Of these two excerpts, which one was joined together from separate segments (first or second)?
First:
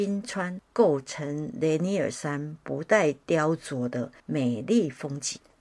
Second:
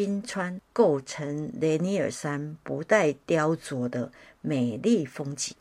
first